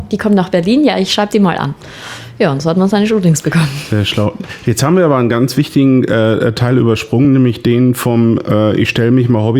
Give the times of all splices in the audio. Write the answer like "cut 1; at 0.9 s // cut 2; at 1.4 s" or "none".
none